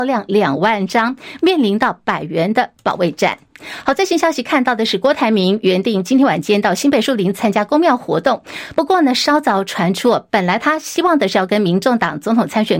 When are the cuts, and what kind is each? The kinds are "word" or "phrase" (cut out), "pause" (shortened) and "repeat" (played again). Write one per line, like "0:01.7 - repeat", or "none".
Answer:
none